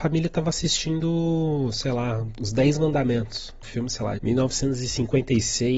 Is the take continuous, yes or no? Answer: no